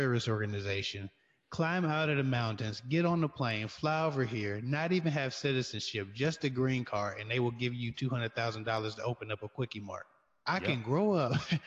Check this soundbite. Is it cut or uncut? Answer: uncut